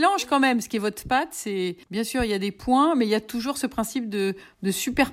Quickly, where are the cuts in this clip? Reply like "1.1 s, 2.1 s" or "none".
1.8 s